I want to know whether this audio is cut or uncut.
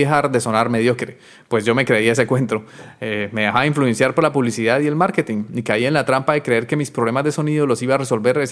uncut